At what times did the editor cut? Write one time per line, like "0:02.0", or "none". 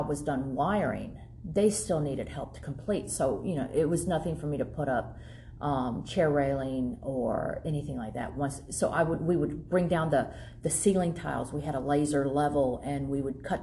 none